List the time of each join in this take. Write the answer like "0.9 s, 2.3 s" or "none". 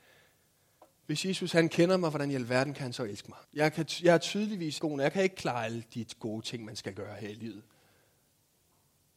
3.4 s, 4.8 s